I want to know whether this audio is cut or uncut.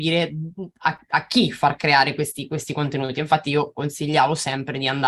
uncut